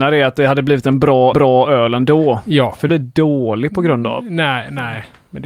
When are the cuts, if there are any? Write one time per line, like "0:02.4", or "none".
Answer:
0:01.3
0:02.9